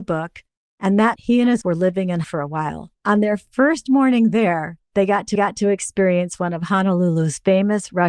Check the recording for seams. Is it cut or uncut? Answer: cut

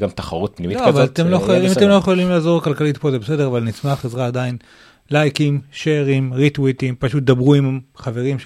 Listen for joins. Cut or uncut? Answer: uncut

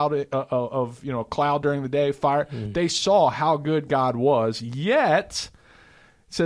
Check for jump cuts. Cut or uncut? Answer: uncut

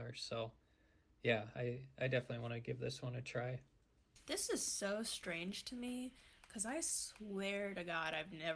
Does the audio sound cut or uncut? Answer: uncut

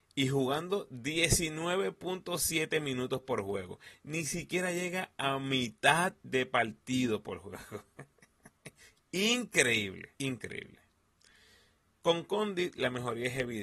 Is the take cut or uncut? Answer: cut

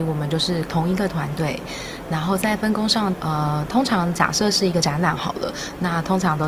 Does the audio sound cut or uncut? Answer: cut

